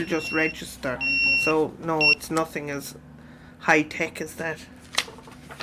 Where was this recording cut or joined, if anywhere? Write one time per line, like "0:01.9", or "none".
none